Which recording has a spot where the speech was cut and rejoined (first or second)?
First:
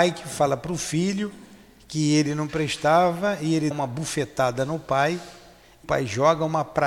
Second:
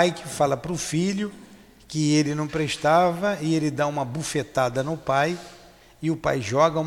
first